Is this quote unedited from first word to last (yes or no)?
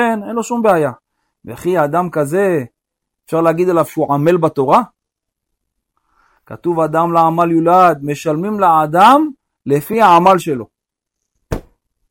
yes